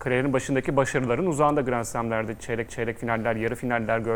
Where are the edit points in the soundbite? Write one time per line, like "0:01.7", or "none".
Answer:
0:02.7